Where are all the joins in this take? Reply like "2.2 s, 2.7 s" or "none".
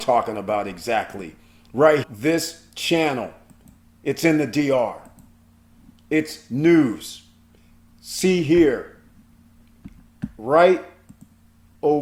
2.0 s